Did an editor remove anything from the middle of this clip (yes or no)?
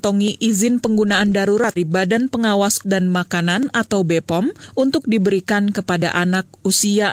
yes